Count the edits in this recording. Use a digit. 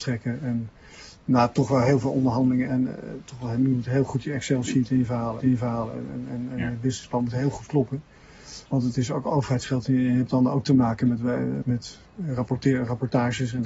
4